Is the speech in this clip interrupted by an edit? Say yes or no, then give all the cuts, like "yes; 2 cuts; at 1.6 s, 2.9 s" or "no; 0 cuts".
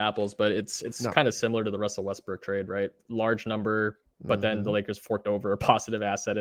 yes; 2 cuts; at 3.0 s, 4.0 s